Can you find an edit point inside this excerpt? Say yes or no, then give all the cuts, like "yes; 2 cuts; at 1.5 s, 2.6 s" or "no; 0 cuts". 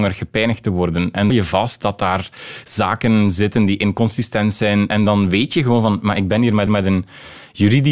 yes; 2 cuts; at 1.3 s, 6.7 s